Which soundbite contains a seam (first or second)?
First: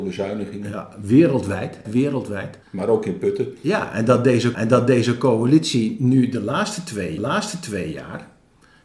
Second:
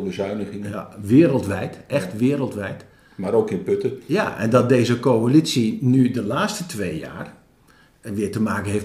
first